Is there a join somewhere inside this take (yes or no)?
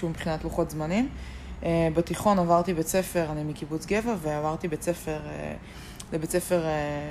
no